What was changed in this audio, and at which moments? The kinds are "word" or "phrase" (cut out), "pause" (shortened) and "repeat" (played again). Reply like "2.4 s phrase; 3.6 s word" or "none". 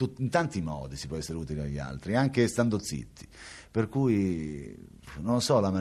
none